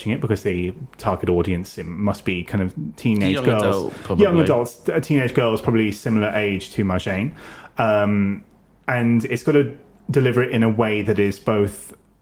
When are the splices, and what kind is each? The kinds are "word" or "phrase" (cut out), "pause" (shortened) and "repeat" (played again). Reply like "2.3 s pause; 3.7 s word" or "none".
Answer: none